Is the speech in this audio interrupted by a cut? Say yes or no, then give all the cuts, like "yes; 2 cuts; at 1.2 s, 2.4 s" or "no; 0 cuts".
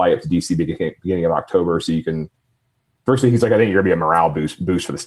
no; 0 cuts